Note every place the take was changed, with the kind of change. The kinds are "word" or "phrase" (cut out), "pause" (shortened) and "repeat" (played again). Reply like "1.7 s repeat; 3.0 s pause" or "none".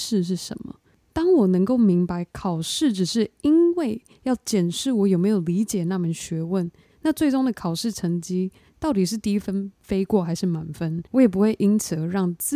11.1 s pause